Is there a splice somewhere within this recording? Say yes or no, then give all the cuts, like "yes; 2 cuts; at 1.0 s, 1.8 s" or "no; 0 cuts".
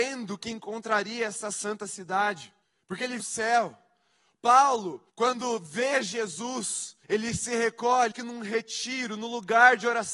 yes; 5 cuts; at 2.6 s, 3.2 s, 5.1 s, 7.0 s, 8.1 s